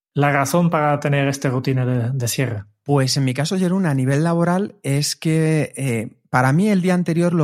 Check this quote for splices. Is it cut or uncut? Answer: uncut